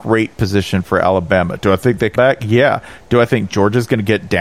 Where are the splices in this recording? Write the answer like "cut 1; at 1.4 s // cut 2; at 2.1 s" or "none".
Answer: cut 1; at 2.2 s